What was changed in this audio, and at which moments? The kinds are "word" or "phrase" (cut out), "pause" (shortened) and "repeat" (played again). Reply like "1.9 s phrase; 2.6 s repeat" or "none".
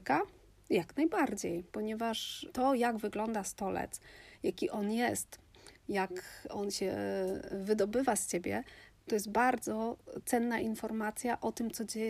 1.7 s pause